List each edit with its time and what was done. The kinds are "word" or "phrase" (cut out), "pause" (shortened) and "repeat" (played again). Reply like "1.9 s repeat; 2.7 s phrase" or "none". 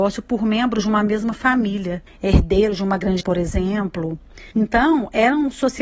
2.1 s pause; 3.2 s word; 4.5 s pause